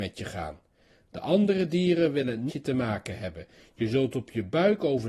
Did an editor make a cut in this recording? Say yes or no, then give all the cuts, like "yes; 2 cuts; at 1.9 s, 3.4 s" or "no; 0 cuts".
yes; 1 cut; at 2.5 s